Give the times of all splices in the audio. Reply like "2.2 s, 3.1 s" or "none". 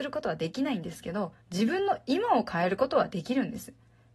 1.4 s